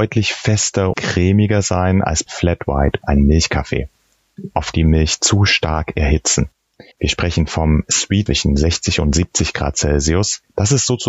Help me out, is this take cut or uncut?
cut